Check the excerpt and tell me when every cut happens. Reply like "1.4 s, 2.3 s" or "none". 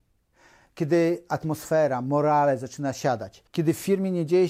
3.5 s